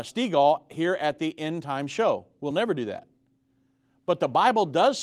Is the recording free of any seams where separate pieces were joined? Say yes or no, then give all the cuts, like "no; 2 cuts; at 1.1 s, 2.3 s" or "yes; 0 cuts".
yes; 0 cuts